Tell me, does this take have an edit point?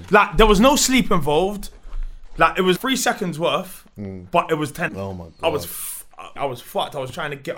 yes; 3 cuts; at 2.8 s, 4.9 s, 6.4 s

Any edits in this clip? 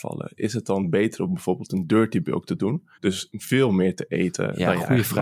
yes; 1 cut; at 2.9 s

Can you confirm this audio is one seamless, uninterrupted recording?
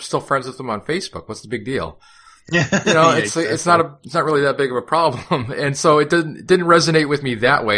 yes; 0 cuts

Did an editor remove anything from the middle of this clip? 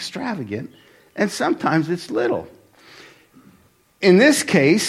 no; 0 cuts

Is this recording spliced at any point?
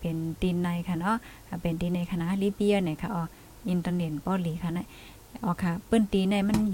no; 0 cuts

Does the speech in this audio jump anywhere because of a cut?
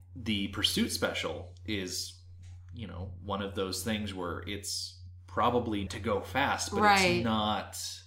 yes; 1 cut; at 5.9 s

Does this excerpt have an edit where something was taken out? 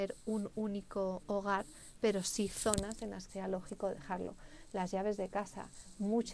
yes; 1 cut; at 3.3 s

